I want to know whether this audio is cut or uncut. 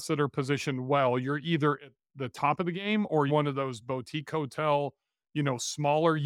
cut